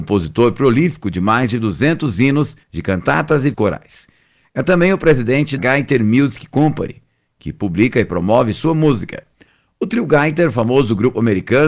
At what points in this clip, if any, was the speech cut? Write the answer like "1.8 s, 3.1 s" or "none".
2.6 s, 3.5 s, 5.6 s